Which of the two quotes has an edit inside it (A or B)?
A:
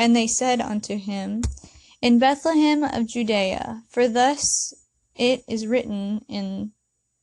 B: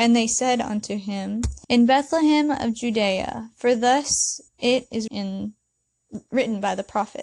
B